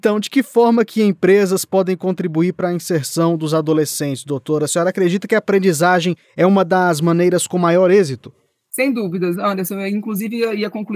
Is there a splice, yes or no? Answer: no